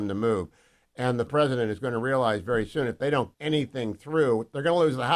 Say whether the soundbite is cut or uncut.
cut